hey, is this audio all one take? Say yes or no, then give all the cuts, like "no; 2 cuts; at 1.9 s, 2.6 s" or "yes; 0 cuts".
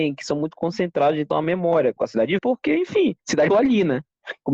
no; 5 cuts; at 1.3 s, 2.0 s, 2.4 s, 3.2 s, 3.5 s